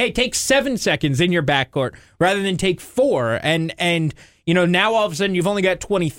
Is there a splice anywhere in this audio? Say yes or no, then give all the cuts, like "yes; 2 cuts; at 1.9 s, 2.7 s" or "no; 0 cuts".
no; 0 cuts